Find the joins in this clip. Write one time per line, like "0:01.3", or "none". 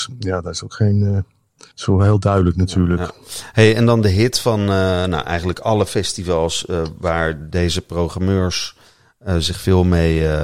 0:01.7